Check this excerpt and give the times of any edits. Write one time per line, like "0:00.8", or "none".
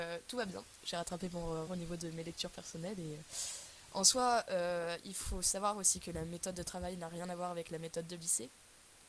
0:01.7